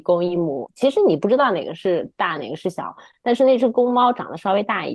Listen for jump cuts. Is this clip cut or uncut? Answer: uncut